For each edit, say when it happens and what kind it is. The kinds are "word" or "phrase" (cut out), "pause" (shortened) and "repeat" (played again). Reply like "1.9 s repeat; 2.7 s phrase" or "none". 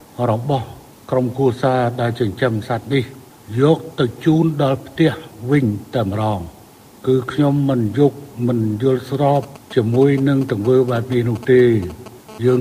none